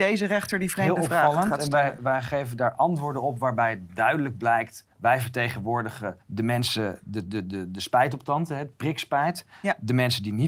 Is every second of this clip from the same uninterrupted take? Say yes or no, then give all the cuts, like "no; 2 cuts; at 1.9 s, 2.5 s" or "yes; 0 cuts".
no; 2 cuts; at 4.9 s, 6.2 s